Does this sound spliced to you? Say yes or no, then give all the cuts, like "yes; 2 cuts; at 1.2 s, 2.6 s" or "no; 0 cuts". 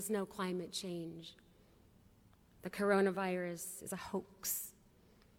no; 0 cuts